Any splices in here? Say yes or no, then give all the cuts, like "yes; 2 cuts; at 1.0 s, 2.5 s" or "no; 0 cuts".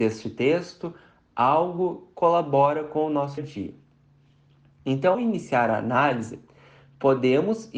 yes; 3 cuts; at 2.1 s, 3.4 s, 5.1 s